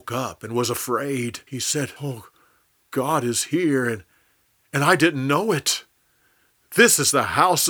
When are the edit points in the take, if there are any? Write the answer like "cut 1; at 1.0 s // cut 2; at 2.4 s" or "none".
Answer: cut 1; at 1.5 s // cut 2; at 2.0 s